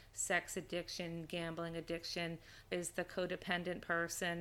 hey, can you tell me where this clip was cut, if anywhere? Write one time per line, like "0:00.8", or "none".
0:02.7